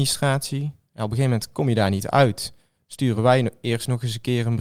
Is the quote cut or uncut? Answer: uncut